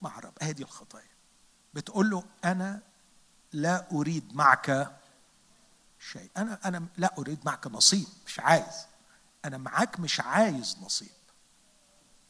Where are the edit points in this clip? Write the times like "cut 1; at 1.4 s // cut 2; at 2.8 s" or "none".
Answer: cut 1; at 1.4 s